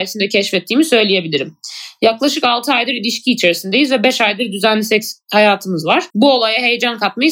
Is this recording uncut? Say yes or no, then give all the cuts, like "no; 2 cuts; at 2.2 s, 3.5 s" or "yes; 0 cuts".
no; 1 cut; at 6.1 s